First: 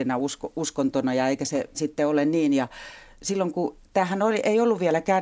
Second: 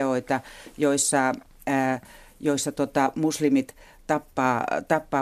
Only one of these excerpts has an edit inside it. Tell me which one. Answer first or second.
first